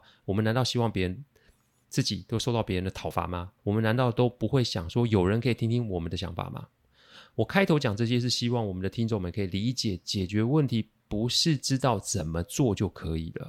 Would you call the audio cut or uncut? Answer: cut